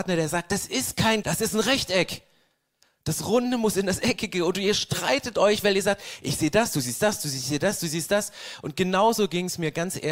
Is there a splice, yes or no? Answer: yes